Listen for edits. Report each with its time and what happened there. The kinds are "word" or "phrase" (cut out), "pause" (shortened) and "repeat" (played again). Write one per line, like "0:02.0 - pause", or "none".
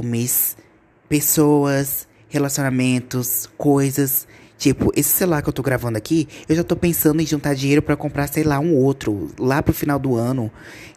none